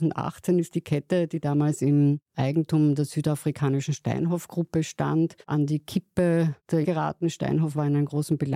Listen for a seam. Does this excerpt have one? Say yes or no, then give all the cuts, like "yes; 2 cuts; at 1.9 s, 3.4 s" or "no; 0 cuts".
yes; 2 cuts; at 5.4 s, 6.8 s